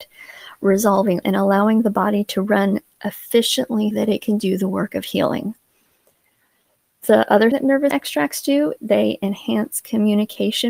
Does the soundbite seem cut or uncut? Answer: cut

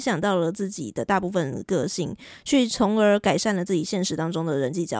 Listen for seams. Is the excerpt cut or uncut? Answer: uncut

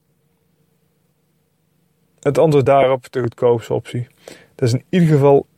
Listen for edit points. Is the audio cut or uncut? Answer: uncut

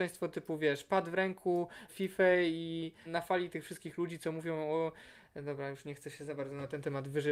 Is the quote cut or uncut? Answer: cut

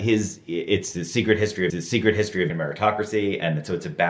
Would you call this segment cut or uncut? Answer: cut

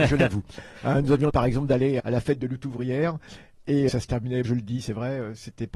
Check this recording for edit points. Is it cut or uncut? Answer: cut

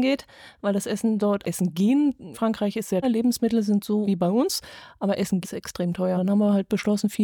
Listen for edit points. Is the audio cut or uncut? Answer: cut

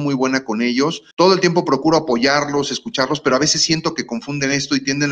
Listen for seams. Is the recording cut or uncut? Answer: cut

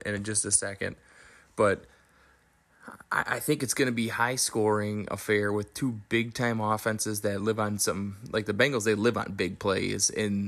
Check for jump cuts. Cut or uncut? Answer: uncut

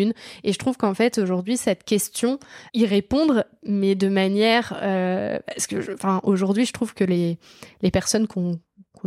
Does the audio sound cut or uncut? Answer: cut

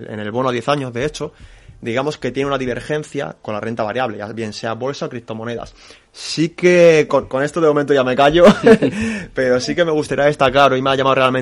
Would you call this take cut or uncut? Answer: uncut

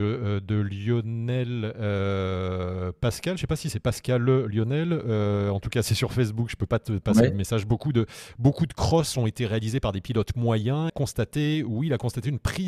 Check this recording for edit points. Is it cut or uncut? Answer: cut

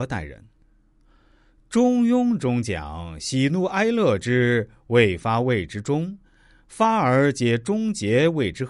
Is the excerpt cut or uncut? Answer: uncut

